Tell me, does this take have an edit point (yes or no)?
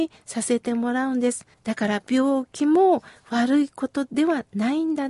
yes